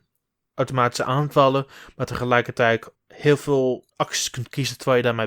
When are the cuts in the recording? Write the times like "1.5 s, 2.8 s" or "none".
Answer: 2.9 s, 3.9 s